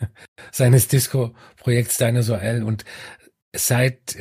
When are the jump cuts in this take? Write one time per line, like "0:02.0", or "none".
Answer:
none